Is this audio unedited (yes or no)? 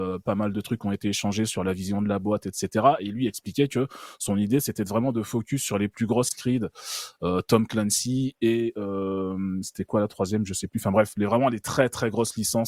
no